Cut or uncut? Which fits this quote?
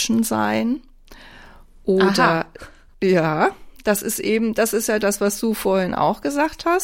uncut